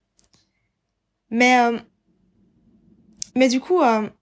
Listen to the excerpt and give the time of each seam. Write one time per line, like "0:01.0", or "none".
0:03.3